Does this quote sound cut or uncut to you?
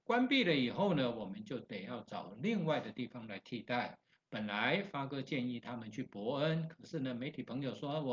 uncut